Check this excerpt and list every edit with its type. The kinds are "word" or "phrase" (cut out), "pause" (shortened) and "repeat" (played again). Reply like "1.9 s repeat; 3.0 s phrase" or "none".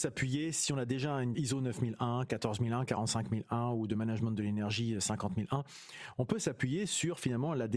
1.3 s phrase